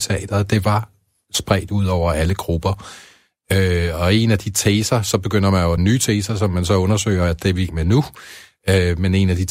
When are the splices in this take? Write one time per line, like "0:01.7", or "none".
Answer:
0:05.8
0:07.7